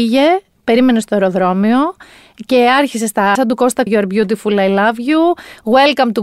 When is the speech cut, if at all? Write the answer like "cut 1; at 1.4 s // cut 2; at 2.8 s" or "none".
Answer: cut 1; at 3.4 s // cut 2; at 3.9 s